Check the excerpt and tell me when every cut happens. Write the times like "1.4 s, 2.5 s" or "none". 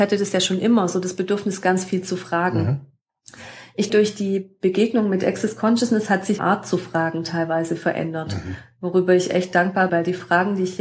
3.9 s, 6.4 s, 9.9 s